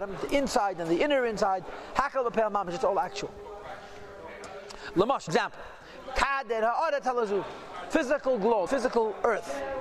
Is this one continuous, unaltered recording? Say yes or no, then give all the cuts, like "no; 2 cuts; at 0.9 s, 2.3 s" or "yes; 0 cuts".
no; 3 cuts; at 5.3 s, 7.9 s, 8.7 s